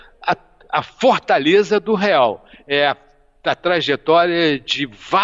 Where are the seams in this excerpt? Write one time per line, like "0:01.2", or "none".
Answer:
none